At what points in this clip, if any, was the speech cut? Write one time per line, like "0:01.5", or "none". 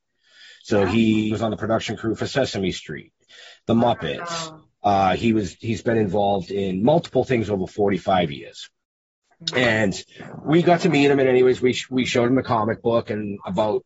0:01.3